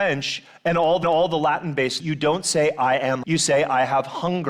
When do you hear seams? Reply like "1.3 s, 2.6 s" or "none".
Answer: 1.0 s, 2.0 s, 3.2 s